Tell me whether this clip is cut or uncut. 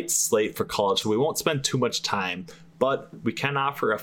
cut